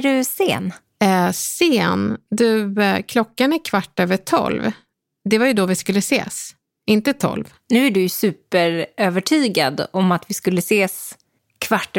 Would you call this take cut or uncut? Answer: uncut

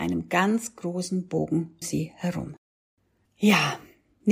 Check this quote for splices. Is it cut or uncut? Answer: cut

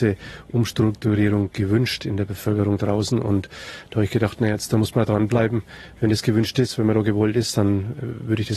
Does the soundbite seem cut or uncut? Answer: uncut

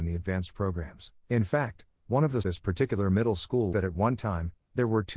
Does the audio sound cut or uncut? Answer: cut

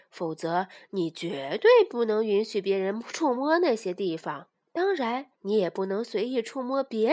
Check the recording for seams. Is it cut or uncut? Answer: cut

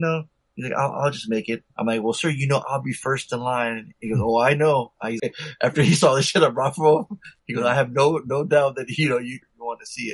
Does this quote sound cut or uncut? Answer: cut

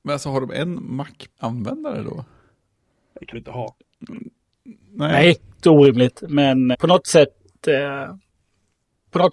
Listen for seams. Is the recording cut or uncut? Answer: cut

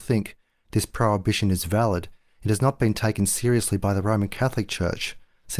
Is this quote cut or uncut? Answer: uncut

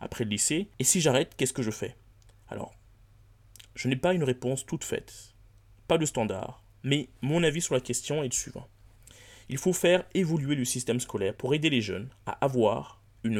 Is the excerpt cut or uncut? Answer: uncut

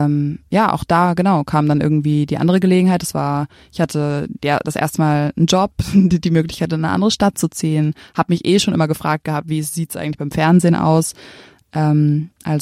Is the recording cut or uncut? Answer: uncut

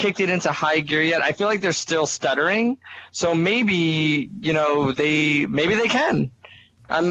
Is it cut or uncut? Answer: uncut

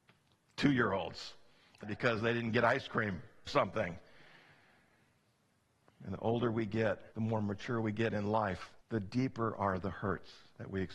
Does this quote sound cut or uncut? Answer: cut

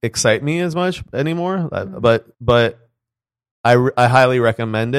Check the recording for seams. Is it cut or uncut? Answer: cut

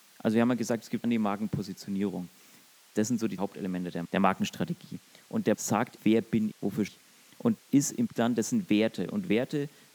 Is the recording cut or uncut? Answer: cut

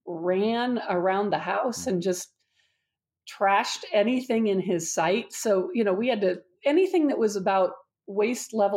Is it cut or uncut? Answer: uncut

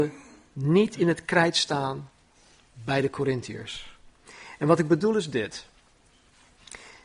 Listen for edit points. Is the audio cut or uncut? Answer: uncut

